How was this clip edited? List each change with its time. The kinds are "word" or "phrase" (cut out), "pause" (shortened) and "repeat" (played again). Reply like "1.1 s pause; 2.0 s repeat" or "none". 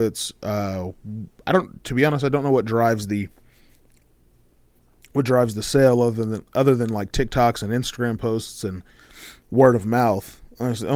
none